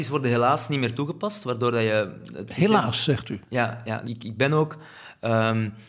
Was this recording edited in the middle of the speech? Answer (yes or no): yes